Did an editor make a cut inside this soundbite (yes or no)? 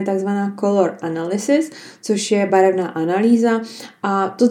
no